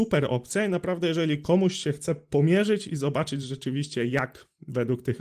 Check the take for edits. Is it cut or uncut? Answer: uncut